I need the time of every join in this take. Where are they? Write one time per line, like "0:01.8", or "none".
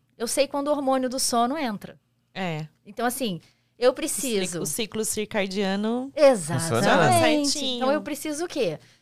none